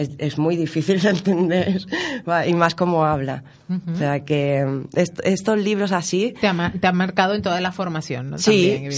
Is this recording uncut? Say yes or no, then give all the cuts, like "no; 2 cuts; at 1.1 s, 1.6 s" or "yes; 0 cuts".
yes; 0 cuts